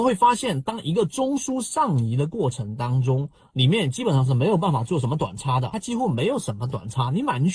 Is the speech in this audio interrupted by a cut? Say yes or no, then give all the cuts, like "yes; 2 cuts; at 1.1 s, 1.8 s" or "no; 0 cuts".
no; 0 cuts